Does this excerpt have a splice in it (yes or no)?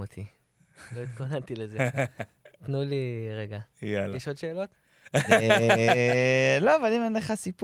no